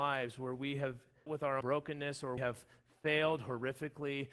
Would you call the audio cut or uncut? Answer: cut